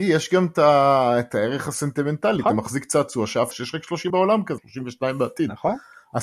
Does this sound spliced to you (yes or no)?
yes